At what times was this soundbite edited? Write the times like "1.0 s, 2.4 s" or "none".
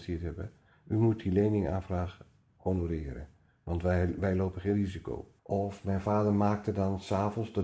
5.4 s